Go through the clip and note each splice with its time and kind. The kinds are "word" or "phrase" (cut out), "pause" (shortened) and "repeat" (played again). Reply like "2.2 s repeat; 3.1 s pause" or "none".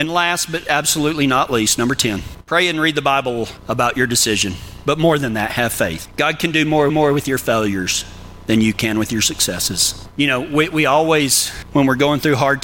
6.9 s repeat